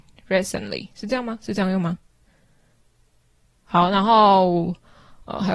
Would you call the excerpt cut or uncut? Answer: uncut